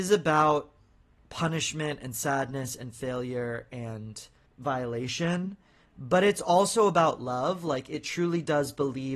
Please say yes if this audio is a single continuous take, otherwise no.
no